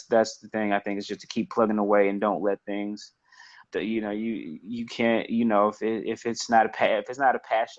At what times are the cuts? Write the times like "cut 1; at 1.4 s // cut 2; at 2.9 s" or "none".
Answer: cut 1; at 3.6 s